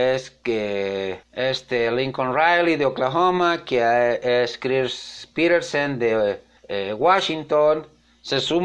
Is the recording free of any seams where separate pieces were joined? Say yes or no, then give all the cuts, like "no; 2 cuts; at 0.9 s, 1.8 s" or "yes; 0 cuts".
no; 2 cuts; at 1.2 s, 6.6 s